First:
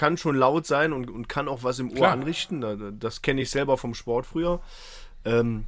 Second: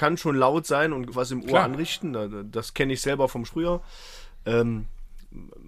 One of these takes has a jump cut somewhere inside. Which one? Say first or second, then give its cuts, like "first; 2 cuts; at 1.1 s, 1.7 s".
second; 2 cuts; at 1.1 s, 3.5 s